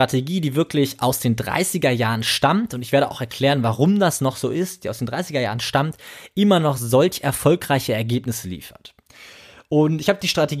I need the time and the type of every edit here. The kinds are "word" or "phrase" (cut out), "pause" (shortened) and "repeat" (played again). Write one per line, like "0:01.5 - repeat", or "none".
none

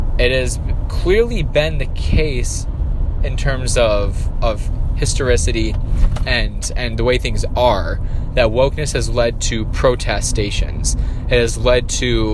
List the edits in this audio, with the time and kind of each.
none

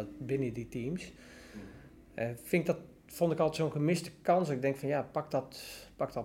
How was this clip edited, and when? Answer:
none

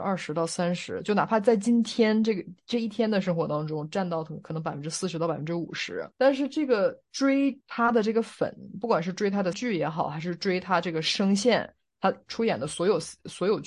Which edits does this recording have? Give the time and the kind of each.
0:06.1 - pause
0:07.6 - pause
0:09.5 - word

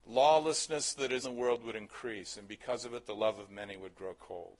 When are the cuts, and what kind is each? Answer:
0:01.2 - word

